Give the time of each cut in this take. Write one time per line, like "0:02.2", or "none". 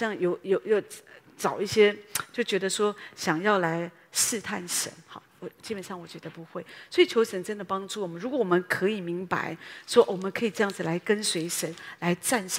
none